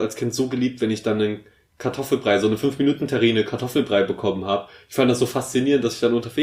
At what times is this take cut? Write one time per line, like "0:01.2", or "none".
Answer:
none